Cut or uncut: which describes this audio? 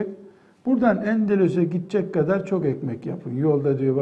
uncut